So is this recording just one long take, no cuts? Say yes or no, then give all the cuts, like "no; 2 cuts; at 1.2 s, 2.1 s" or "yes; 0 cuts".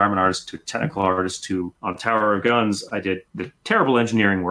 no; 2 cuts; at 1.8 s, 3.3 s